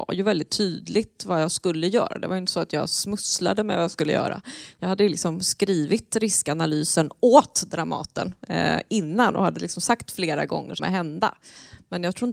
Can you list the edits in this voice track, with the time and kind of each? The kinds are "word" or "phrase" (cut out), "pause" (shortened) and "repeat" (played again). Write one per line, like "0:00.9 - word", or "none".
0:10.8 - phrase